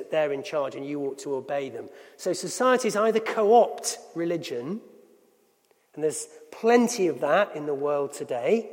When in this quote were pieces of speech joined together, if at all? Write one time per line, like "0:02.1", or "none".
none

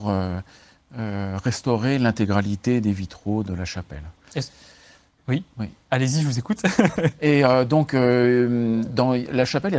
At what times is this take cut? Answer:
none

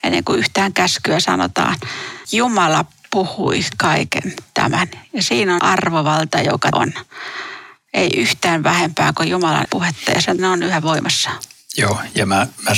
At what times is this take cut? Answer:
0:02.2
0:05.6
0:06.7
0:09.6
0:10.4

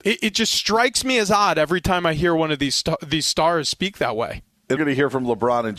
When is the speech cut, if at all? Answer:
0:04.8

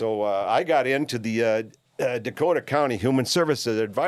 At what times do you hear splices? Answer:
none

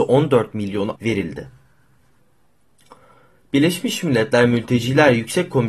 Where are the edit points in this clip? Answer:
0:01.0

